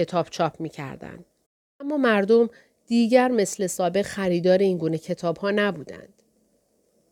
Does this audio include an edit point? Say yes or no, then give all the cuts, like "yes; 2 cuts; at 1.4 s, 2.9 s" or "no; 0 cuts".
no; 0 cuts